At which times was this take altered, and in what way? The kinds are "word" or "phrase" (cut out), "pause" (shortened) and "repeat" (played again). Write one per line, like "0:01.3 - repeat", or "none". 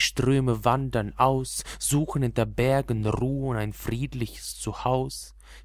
none

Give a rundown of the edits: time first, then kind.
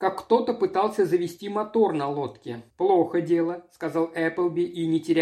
0:02.7 - pause

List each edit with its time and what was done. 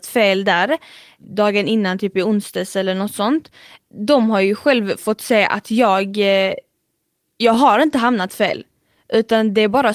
none

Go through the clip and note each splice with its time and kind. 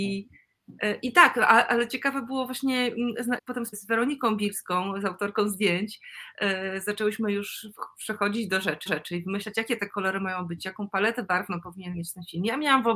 0:03.4 - word
0:03.7 - word
0:08.9 - repeat

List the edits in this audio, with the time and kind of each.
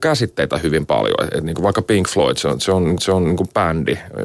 0:03.0 - repeat

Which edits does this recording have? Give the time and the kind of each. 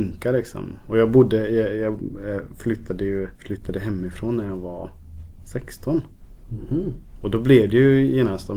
0:03.3 - pause

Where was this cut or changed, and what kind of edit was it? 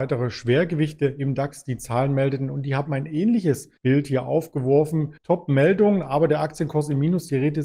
0:03.8 - pause
0:05.2 - pause

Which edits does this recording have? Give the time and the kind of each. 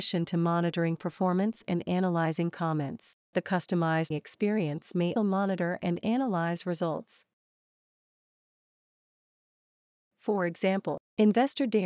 0:04.1 - word
0:05.2 - word

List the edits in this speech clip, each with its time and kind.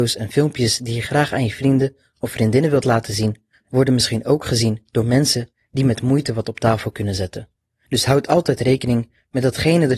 none

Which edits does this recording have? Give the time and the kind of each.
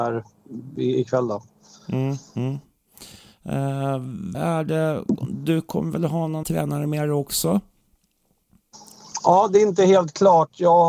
0:04.3 - word
0:06.4 - word

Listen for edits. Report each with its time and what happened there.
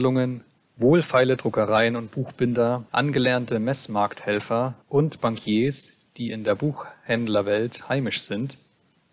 0:02.9 - pause
0:04.8 - pause

